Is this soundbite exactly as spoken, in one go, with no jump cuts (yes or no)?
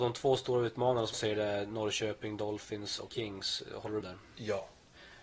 no